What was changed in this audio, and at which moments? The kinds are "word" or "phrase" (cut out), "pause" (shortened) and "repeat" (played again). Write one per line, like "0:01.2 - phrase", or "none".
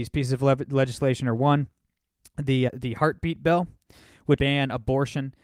0:02.7 - word
0:04.4 - word